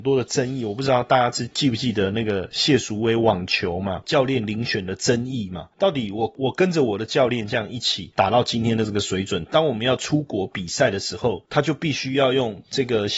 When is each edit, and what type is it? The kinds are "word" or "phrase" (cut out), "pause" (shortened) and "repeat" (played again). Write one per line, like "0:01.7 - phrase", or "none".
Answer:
0:04.0 - word